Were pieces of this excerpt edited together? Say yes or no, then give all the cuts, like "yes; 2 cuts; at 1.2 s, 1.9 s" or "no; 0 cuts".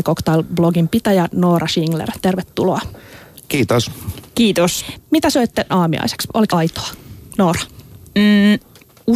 yes; 2 cuts; at 5.7 s, 6.5 s